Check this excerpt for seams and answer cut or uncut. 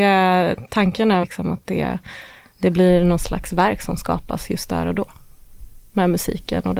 cut